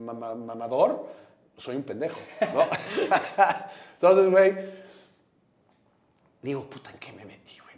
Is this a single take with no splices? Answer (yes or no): yes